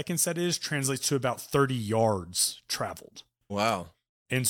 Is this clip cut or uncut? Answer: cut